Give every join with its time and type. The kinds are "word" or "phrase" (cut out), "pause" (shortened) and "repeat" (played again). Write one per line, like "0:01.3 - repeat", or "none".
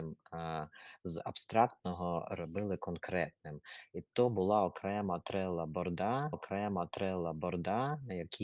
0:06.3 - repeat